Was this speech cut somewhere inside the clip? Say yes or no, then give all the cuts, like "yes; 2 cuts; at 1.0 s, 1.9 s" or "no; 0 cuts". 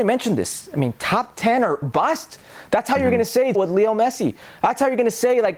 yes; 2 cuts; at 1.8 s, 3.5 s